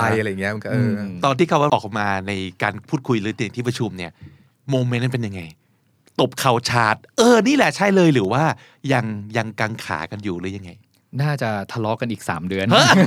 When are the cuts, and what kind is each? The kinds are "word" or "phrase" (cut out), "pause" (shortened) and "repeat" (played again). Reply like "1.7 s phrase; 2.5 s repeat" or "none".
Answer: 1.7 s word